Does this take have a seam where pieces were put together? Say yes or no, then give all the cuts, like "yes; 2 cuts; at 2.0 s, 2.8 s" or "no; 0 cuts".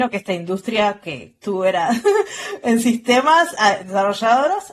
no; 0 cuts